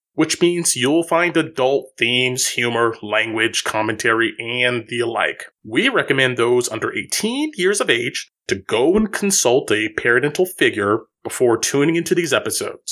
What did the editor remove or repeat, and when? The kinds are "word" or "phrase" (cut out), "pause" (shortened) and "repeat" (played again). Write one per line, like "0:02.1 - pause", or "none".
0:05.6 - pause